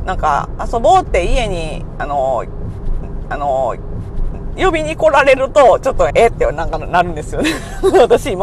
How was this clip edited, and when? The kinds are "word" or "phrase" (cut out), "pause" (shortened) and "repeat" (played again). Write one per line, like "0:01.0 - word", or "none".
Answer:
0:03.2 - repeat
0:06.1 - word